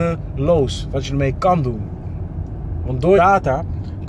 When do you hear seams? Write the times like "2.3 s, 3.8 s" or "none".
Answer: 3.2 s